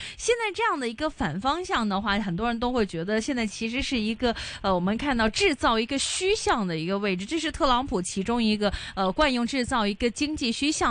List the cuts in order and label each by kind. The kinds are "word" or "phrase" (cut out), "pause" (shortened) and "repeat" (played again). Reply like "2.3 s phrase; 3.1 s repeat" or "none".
none